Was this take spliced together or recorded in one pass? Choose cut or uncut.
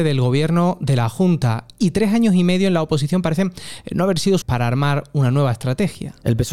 cut